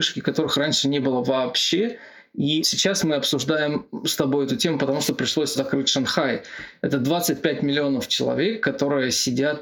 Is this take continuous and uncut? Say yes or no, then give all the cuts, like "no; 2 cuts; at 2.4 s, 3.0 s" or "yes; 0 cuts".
yes; 0 cuts